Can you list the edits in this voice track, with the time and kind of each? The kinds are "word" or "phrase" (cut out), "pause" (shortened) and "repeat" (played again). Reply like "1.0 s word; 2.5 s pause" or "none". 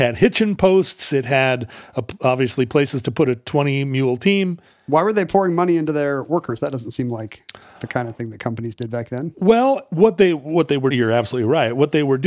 10.9 s word